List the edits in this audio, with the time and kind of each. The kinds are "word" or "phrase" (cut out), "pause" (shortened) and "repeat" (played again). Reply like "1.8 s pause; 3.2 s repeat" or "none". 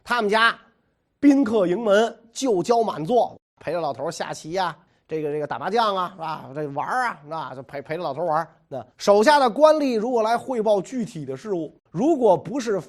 4.9 s pause; 8.9 s pause; 11.9 s pause